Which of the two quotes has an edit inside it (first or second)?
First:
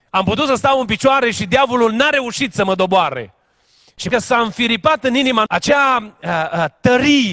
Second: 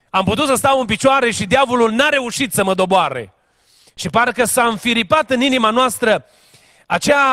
first